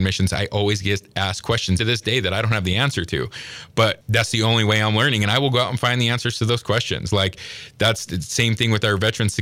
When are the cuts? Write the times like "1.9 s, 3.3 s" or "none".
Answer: 1.8 s